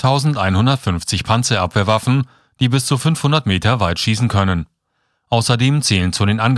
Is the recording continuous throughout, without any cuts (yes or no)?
yes